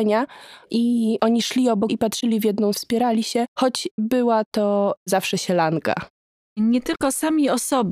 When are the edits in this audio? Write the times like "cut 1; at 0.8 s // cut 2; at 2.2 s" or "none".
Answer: cut 1; at 1.9 s // cut 2; at 2.7 s // cut 3; at 4.0 s